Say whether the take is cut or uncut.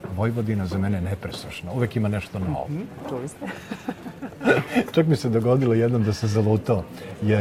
uncut